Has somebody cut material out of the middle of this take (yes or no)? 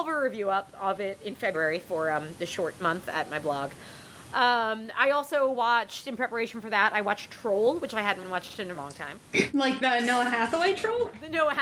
yes